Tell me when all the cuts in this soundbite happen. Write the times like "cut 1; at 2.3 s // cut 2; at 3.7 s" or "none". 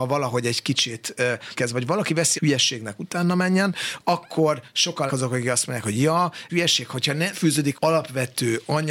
cut 1; at 1.5 s // cut 2; at 2.3 s // cut 3; at 5.1 s // cut 4; at 6.5 s // cut 5; at 7.3 s // cut 6; at 7.7 s